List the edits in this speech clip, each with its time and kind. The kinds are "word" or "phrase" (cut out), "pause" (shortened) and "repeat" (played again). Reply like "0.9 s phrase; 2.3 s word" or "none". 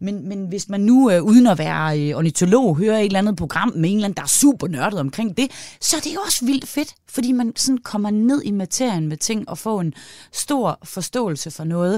none